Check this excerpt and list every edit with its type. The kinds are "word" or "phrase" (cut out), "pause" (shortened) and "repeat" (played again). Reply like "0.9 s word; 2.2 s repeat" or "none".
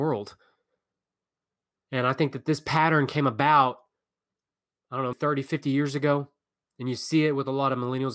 5.1 s word